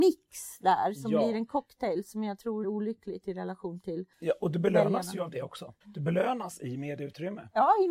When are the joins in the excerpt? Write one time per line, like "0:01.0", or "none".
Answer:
0:02.6
0:04.1
0:05.8